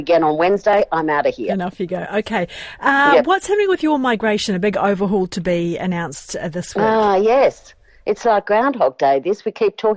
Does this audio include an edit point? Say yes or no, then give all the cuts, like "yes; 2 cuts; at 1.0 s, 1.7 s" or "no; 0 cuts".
no; 0 cuts